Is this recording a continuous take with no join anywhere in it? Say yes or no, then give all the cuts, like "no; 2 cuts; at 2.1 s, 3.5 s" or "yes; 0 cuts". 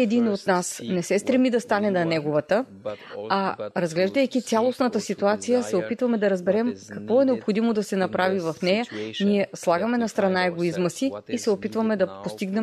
yes; 0 cuts